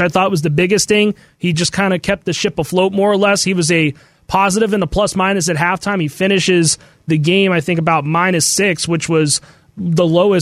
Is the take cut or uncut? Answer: uncut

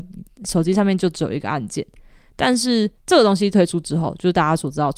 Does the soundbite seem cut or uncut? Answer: cut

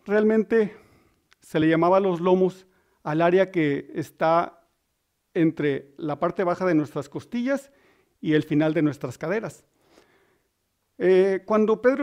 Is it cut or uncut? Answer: uncut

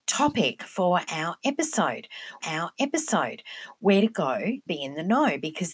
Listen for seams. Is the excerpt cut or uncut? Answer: cut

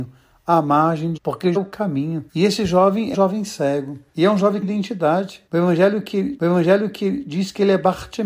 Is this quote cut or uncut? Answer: cut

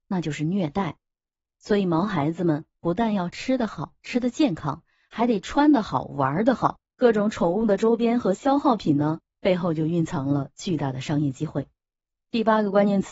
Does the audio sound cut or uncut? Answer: uncut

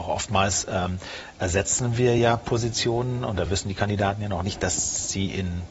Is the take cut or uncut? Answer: uncut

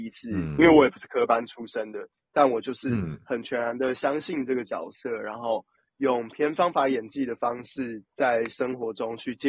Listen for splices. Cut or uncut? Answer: uncut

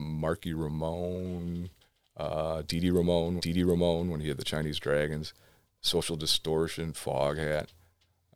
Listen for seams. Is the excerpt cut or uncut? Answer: cut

